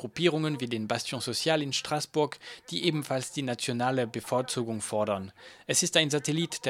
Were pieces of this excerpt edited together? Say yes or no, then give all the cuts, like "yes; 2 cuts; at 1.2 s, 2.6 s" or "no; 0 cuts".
no; 0 cuts